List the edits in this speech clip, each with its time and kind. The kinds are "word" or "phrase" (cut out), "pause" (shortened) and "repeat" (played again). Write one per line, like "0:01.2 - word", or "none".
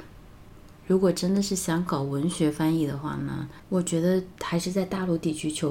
0:03.6 - pause

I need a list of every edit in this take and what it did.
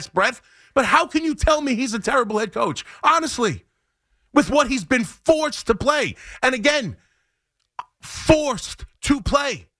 none

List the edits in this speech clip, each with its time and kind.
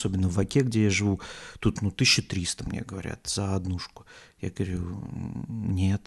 none

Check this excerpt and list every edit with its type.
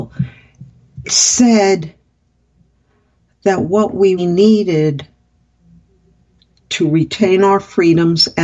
0:01.0 - word
0:04.2 - word

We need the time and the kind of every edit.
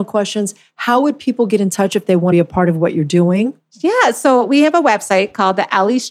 0:02.3 - phrase

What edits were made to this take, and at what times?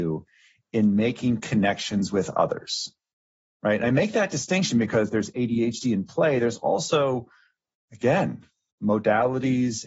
none

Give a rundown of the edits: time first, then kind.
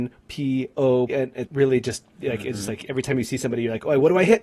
0:01.1 - word
0:01.5 - word

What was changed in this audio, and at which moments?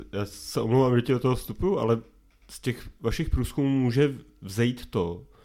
none

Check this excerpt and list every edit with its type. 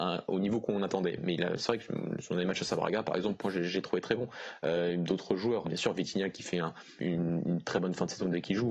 0:05.6 - word
0:07.0 - word

